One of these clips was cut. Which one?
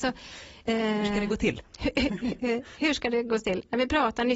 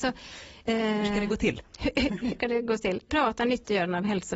second; 2 cuts; at 2.4 s, 3.1 s

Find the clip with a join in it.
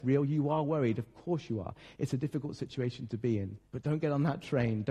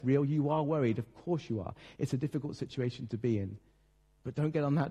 first; 1 cut; at 3.6 s

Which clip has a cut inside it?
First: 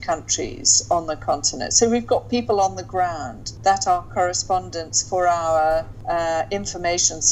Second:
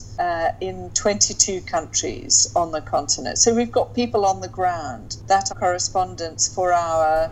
second; 1 cut; at 5.5 s

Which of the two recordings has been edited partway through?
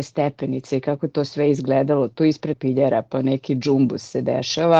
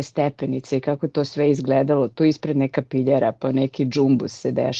first; 1 cut; at 2.5 s

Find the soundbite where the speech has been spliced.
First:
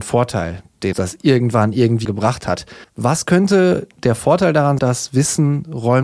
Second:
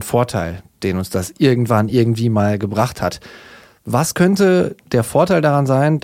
first; 4 cuts; at 0.9 s, 2.0 s, 2.8 s, 4.8 s

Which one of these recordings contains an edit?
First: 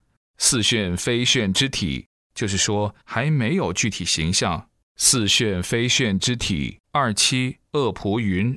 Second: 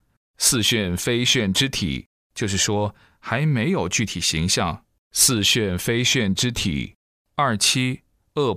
first; 3 cuts; at 3.0 s, 6.8 s, 7.7 s

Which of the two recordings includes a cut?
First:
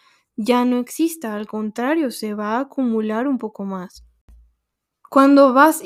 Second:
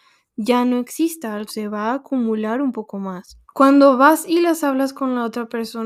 second; 2 cuts; at 1.5 s, 3.4 s

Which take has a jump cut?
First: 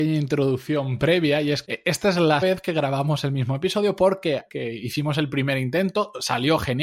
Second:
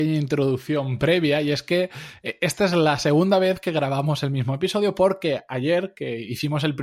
first; 3 cuts; at 1.6 s, 2.4 s, 4.5 s

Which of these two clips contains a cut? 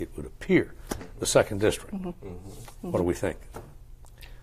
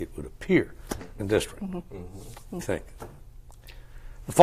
second; 2 cuts; at 1.2 s, 2.6 s

